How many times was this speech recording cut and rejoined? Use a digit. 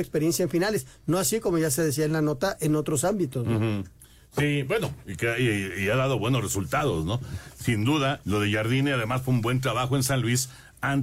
1